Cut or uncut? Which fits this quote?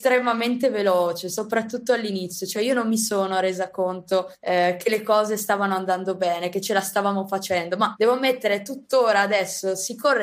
uncut